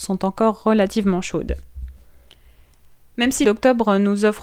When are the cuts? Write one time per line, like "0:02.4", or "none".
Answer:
0:03.4